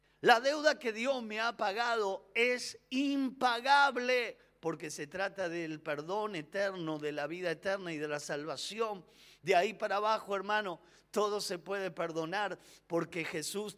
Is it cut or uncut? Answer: uncut